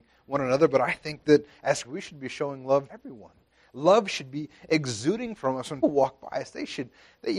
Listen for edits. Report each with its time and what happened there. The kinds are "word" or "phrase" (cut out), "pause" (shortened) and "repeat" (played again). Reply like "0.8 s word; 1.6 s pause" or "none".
1.8 s word; 2.9 s word; 5.8 s word